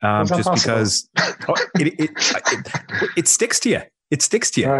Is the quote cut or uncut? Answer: uncut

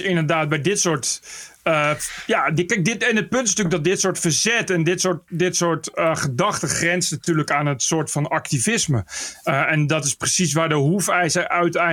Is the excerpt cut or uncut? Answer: uncut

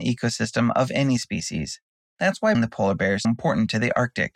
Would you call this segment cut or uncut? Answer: cut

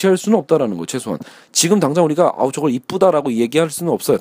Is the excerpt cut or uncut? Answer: uncut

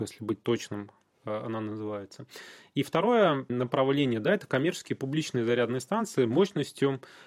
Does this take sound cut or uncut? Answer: uncut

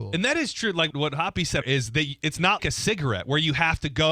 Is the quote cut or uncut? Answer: cut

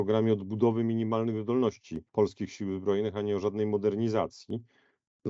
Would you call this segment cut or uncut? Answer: cut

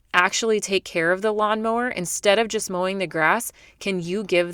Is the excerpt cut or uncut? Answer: uncut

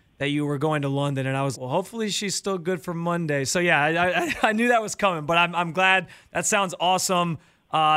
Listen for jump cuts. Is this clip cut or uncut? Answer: cut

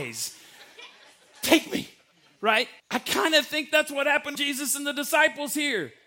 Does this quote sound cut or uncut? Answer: cut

